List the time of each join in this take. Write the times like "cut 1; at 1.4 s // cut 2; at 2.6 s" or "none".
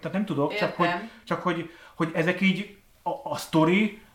none